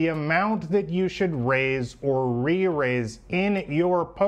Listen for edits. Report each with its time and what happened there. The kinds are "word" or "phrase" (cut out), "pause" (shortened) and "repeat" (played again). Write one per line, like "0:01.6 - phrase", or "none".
none

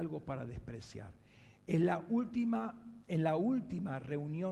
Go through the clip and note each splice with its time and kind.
none

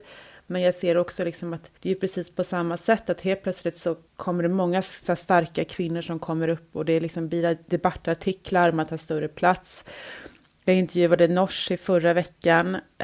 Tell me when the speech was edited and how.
0:01.8 - pause
0:04.1 - pause

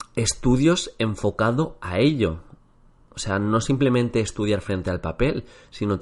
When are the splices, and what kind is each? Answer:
none

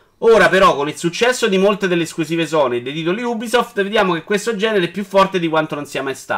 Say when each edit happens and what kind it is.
none

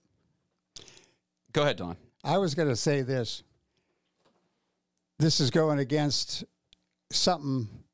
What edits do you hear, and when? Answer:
none

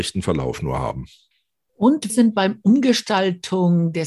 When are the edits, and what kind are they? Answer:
0:02.1 - word

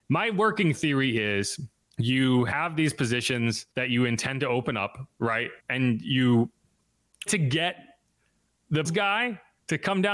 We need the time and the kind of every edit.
0:01.8 - pause
0:03.7 - pause
0:05.6 - pause
0:07.3 - word
0:08.8 - word

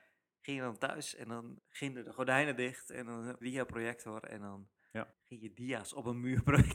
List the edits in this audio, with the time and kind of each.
0:01.6 - word
0:03.4 - phrase
0:05.1 - pause

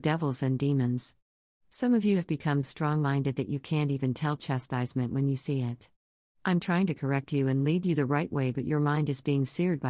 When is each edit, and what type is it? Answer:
0:02.6 - word

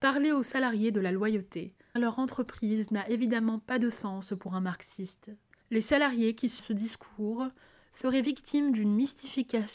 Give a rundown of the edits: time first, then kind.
0:02.0 - word
0:06.6 - phrase

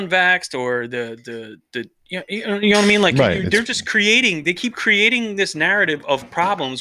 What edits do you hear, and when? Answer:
none

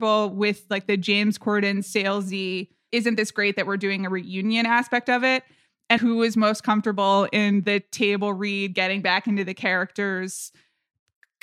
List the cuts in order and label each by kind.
0:02.9 - word
0:06.0 - word

